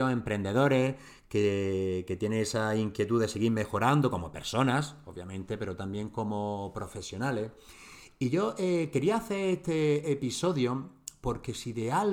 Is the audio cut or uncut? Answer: uncut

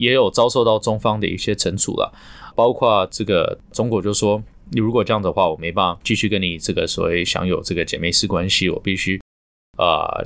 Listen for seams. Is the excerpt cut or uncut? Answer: cut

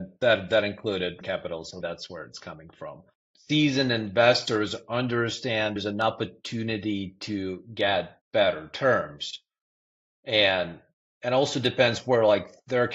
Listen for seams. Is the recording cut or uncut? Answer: cut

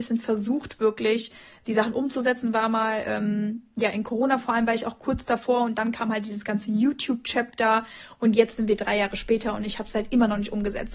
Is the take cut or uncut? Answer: uncut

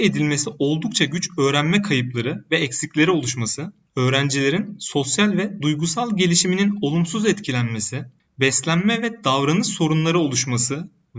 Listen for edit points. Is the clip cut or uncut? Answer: uncut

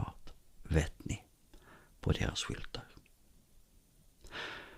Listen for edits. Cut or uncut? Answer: uncut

